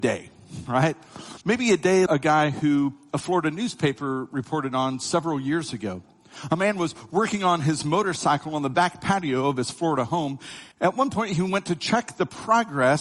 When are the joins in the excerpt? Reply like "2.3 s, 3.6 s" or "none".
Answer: 1.4 s, 2.1 s, 10.7 s